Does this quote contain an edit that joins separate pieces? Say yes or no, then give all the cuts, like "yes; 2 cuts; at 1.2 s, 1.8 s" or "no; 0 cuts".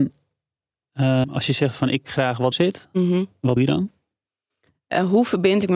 yes; 4 cuts; at 1.2 s, 2.0 s, 2.5 s, 3.6 s